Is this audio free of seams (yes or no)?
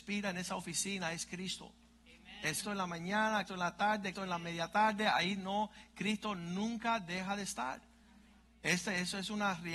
no